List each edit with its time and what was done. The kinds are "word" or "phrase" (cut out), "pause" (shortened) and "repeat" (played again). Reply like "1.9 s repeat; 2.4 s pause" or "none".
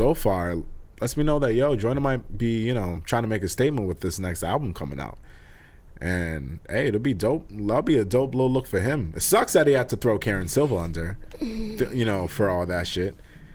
none